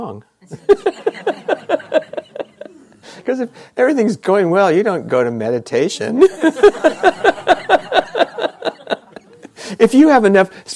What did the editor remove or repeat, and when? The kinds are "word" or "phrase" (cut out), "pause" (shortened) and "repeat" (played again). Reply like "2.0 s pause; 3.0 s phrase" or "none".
none